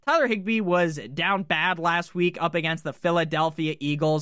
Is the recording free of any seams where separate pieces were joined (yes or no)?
yes